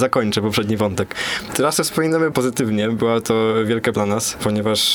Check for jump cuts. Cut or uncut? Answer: cut